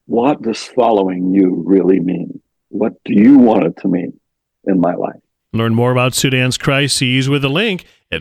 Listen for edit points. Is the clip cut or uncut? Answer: uncut